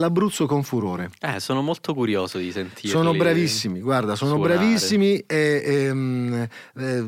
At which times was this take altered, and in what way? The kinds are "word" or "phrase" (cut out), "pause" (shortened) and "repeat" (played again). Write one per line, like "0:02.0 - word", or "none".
none